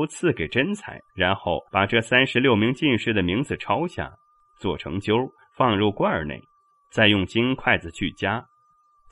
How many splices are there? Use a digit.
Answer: 2